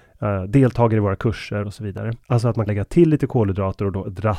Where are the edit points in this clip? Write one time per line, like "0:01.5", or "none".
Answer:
0:01.6
0:02.2
0:02.7